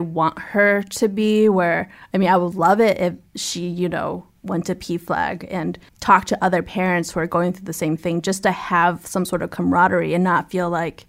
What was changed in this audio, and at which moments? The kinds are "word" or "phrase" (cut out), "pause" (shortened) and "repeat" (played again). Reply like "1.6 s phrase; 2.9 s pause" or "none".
5.9 s pause